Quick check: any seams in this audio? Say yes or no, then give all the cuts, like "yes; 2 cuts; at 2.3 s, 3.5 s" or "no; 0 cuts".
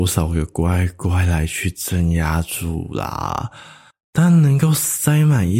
yes; 1 cut; at 3.9 s